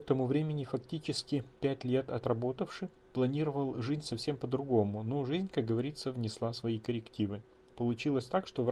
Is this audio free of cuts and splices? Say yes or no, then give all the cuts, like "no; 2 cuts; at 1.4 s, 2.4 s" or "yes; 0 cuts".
no; 1 cut; at 1.6 s